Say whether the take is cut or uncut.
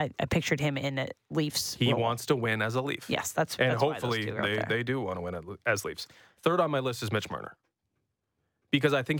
uncut